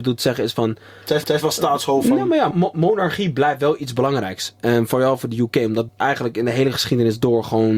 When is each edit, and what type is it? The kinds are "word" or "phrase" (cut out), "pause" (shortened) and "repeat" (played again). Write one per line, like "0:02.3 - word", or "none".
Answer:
0:01.2 - repeat
0:02.5 - word
0:05.9 - word